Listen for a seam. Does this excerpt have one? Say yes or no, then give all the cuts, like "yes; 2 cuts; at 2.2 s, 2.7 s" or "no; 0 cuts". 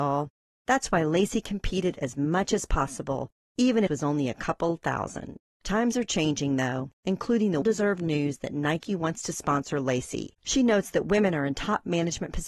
yes; 4 cuts; at 3.9 s, 6.9 s, 7.6 s, 10.4 s